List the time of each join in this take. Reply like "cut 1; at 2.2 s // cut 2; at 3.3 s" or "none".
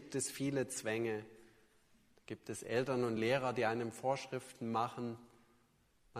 none